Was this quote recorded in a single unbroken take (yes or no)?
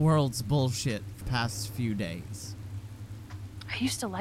no